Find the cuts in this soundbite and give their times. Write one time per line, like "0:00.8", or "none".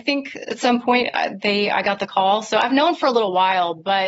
none